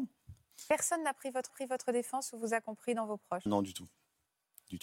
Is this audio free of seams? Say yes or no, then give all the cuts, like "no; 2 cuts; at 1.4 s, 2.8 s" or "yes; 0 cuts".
no; 2 cuts; at 1.5 s, 3.5 s